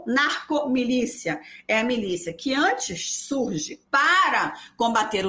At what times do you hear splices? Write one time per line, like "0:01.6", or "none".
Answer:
0:03.9